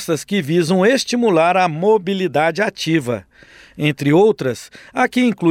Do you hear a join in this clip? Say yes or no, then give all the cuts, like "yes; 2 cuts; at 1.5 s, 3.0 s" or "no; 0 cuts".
no; 0 cuts